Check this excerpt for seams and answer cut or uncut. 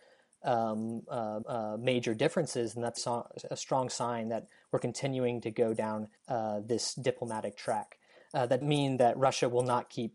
cut